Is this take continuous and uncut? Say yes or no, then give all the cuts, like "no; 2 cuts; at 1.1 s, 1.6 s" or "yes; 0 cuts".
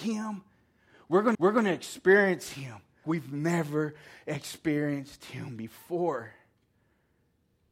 no; 2 cuts; at 1.3 s, 3.0 s